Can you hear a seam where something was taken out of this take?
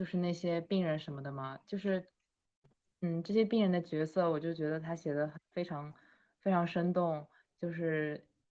no; 0 cuts

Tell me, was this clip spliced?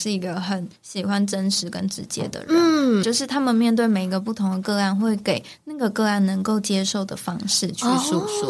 yes; 1 cut; at 3.0 s

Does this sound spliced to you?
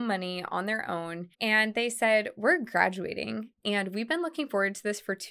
yes; 1 cut; at 1.3 s

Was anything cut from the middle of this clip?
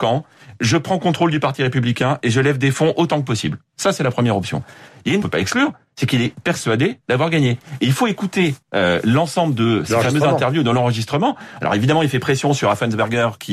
yes; 2 cuts; at 5.2 s, 8.6 s

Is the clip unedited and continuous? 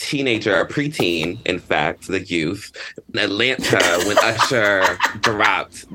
no; 2 cuts; at 2.1 s, 3.1 s

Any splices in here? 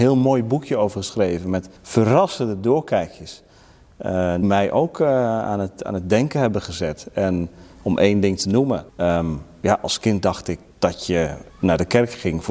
yes; 5 cuts; at 1.8 s, 4.4 s, 8.9 s, 10.7 s, 11.5 s

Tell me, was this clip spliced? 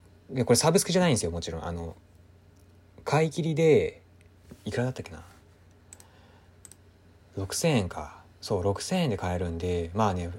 no; 0 cuts

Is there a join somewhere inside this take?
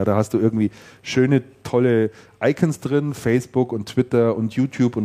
no; 0 cuts

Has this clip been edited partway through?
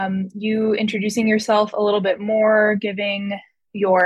no; 0 cuts

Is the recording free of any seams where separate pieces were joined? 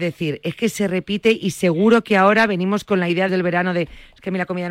no; 1 cut; at 3.3 s

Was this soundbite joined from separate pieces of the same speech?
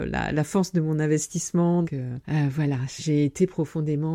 yes; 2 cuts; at 1.8 s, 3.0 s

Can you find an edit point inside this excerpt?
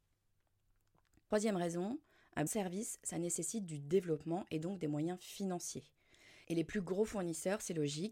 yes; 1 cut; at 2.5 s

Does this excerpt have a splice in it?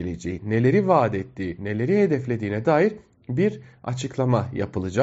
no; 0 cuts

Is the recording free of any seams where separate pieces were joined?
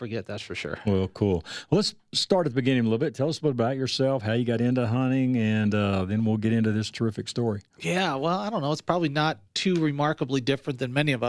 no; 1 cut; at 9.5 s

